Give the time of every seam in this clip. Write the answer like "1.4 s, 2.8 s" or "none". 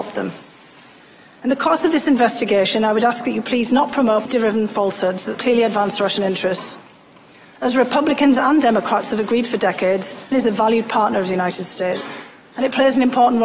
4.3 s, 5.3 s, 10.3 s